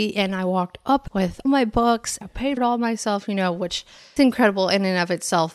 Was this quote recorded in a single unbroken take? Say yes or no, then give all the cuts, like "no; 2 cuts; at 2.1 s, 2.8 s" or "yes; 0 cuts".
no; 5 cuts; at 1.1 s, 1.4 s, 2.2 s, 2.6 s, 4.2 s